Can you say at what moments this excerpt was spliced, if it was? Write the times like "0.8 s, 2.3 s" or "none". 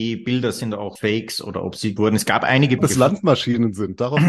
1.0 s, 2.0 s, 2.8 s